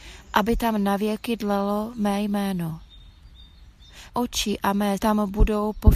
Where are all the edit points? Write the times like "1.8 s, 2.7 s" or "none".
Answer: 4.1 s, 5.0 s

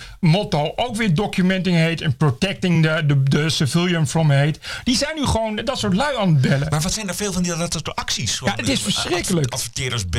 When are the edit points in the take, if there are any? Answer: none

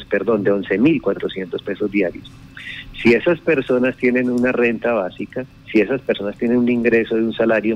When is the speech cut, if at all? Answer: none

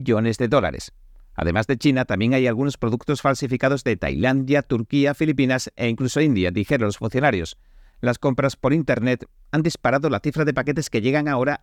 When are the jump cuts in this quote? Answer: none

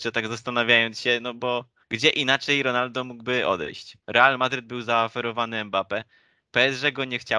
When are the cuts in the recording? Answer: 1.8 s, 4.0 s

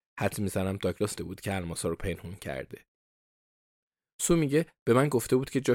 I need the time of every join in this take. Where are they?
1.2 s, 2.0 s

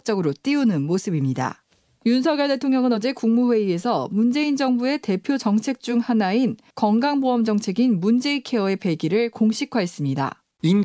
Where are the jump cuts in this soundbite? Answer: none

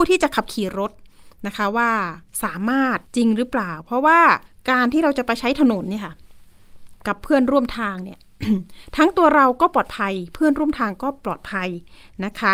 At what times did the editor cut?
3.1 s, 4.5 s

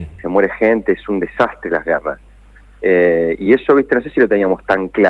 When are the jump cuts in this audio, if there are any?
none

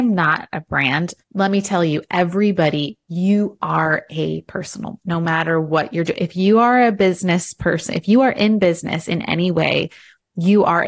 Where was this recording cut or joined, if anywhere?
1.2 s, 5.0 s

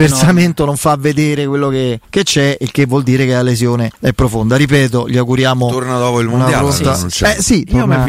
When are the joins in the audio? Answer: 2.0 s, 4.0 s

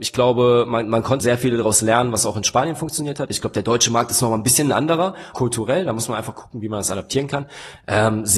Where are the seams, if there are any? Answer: 1.2 s, 5.3 s

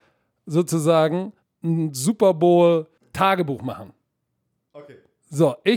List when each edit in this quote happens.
1.4 s, 3.0 s

